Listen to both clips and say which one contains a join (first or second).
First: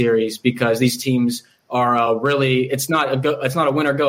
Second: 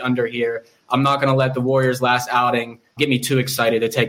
second